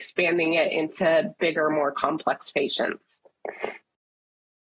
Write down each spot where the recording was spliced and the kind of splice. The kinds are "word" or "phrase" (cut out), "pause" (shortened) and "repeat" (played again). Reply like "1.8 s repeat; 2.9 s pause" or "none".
none